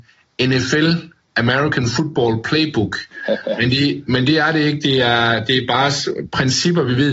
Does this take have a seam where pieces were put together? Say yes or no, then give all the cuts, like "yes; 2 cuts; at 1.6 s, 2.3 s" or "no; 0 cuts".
no; 0 cuts